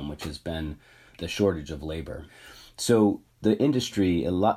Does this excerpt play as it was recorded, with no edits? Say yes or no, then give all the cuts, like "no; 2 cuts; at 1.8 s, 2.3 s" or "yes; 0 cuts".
yes; 0 cuts